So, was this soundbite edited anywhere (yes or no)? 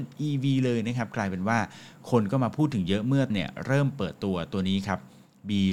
yes